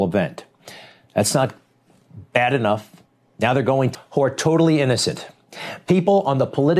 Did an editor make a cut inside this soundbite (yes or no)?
yes